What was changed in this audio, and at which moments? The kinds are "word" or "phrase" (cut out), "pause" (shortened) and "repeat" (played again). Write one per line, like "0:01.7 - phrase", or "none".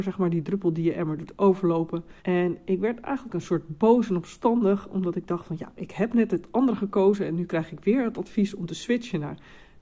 0:02.2 - pause